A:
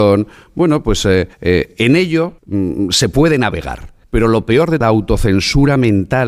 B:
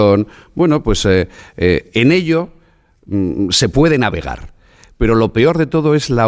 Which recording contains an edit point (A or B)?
A